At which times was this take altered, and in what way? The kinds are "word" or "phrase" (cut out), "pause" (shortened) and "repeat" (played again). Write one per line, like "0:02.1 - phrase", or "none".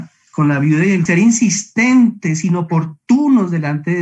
0:01.1 - word